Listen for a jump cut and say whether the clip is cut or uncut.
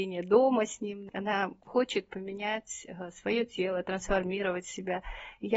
uncut